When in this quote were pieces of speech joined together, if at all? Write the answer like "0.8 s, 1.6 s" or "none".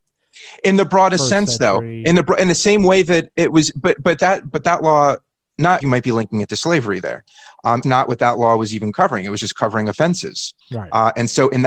5.8 s, 7.8 s, 10.6 s